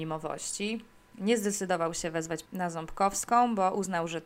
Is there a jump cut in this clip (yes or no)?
yes